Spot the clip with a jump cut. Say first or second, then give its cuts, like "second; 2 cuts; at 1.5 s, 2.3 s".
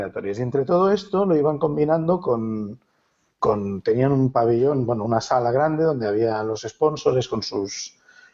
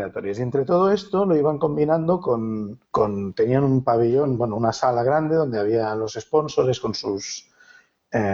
second; 1 cut; at 2.8 s